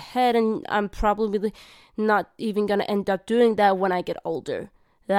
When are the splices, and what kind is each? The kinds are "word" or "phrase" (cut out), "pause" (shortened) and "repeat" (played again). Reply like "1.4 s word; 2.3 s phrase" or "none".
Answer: none

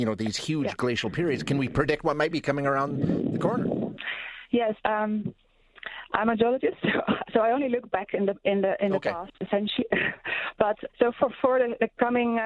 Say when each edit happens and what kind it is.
4.8 s word; 7.2 s word; 10.9 s word

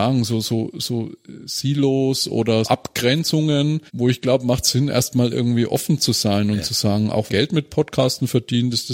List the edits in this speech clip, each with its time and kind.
2.6 s word; 3.9 s pause; 7.3 s phrase

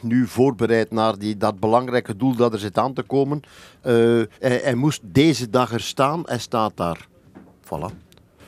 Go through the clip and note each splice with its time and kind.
4.3 s pause

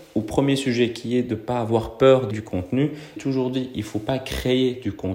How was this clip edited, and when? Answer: 2.3 s word; 3.2 s phrase

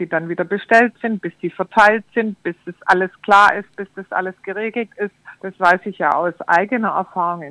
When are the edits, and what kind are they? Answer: 5.4 s pause

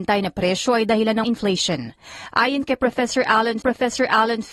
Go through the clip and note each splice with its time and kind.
1.2 s phrase; 3.6 s repeat

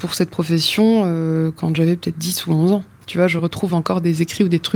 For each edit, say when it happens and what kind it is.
none

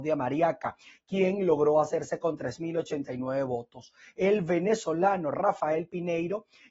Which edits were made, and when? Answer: none

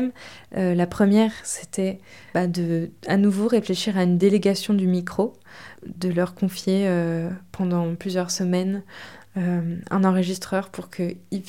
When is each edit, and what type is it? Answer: none

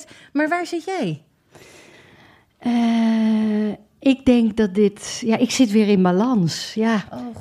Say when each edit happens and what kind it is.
none

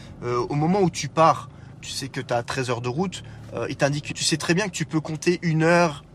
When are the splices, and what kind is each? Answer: 1.8 s word; 4.1 s phrase

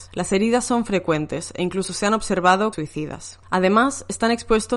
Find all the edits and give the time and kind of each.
2.7 s word

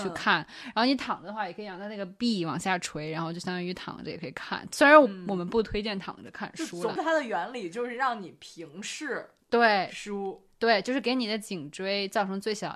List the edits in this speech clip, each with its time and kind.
7.0 s phrase

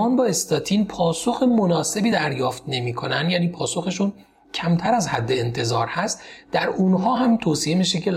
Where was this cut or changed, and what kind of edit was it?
none

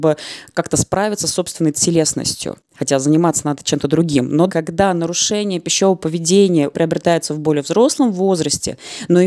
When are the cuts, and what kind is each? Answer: 2.6 s pause; 4.5 s word; 6.7 s word

